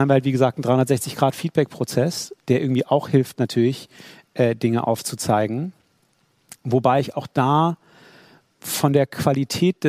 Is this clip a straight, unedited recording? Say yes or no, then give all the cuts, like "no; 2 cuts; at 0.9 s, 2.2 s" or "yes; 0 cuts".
yes; 0 cuts